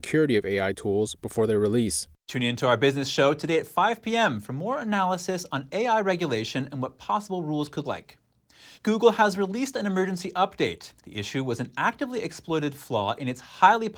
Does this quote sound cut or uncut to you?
cut